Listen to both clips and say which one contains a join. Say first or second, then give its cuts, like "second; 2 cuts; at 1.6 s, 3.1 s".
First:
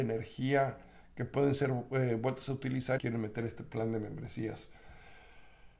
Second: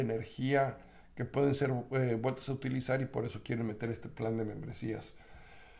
first; 1 cut; at 3.0 s